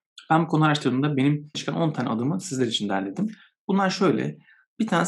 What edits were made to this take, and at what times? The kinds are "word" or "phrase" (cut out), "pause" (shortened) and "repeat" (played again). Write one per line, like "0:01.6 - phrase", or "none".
0:01.5 - word